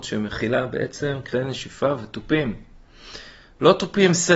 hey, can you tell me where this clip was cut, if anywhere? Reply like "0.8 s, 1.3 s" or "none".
none